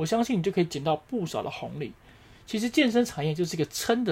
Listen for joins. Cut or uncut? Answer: uncut